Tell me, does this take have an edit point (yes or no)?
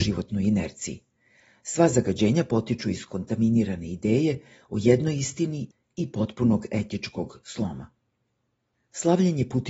no